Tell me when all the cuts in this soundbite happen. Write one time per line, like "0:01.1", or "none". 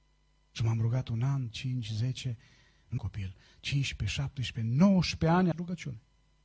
0:01.5
0:03.0
0:05.5